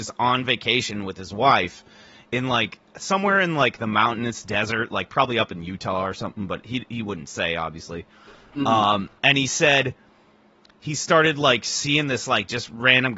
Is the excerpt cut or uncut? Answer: uncut